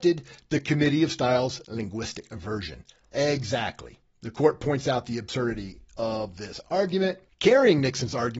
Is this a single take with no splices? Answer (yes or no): yes